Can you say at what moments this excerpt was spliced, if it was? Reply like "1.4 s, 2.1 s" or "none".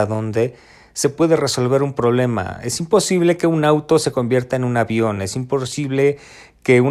none